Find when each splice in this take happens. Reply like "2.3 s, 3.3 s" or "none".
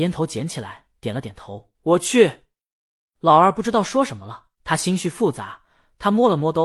1.0 s, 1.7 s, 4.5 s